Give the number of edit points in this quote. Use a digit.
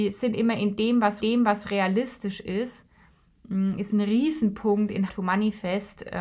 3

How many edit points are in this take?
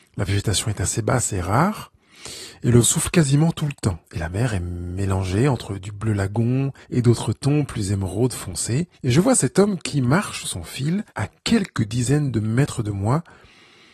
6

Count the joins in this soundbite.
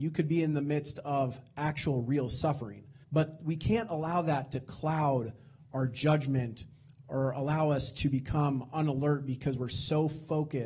1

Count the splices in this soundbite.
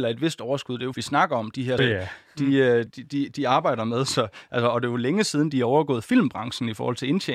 3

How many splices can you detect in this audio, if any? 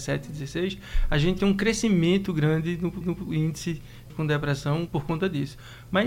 5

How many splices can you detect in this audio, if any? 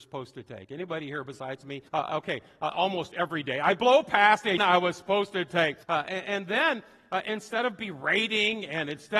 3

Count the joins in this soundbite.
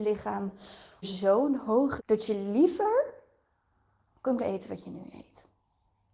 3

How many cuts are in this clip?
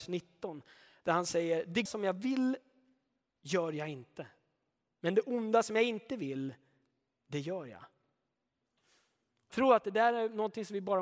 2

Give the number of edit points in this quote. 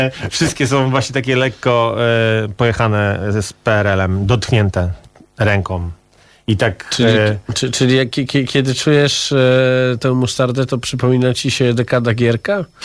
0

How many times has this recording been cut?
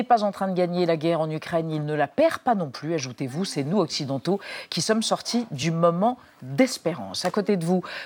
0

